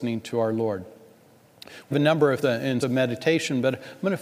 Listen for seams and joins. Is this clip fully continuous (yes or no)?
no